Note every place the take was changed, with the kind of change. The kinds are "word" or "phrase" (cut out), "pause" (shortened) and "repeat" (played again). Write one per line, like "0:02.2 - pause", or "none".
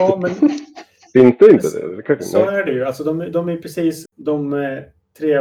0:04.1 - word